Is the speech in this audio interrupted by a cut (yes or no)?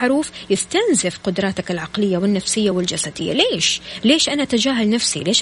no